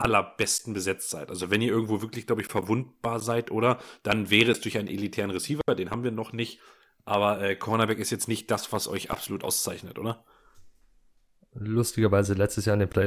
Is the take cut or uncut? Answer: uncut